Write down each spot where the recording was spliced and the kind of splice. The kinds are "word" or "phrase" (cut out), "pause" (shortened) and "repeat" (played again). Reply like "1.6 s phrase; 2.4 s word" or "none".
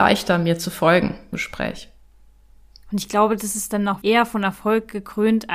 1.3 s word; 4.0 s word